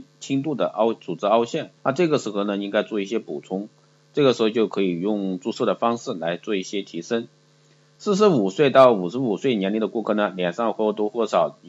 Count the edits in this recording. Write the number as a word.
one